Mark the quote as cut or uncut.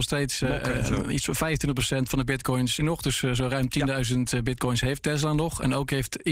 cut